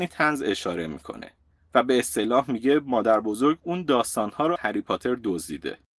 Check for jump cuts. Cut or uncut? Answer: cut